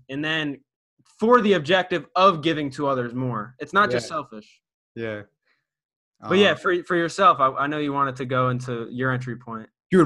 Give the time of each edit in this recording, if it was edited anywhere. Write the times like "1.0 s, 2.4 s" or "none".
none